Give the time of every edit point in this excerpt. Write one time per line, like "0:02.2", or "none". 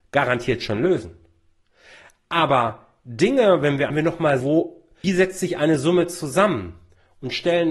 0:03.9
0:04.4
0:05.0